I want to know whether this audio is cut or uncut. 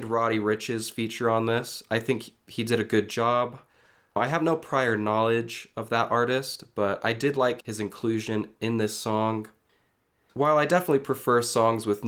uncut